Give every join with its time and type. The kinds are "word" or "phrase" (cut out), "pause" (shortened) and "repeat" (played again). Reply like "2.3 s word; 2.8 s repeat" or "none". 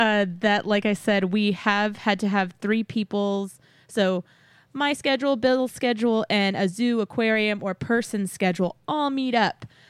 none